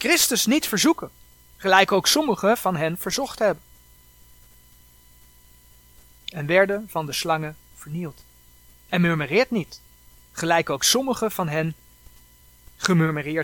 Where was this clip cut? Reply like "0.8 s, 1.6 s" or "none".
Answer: none